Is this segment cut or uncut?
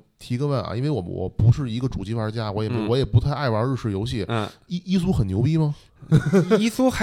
uncut